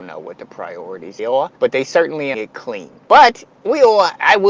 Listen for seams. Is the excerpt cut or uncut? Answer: cut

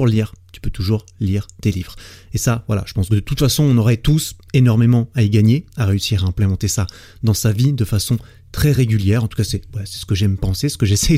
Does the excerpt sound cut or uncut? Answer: uncut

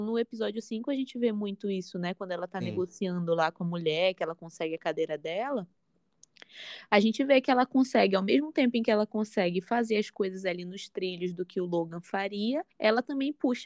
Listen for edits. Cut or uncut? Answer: cut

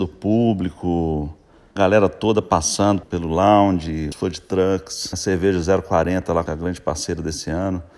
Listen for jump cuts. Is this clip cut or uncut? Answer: cut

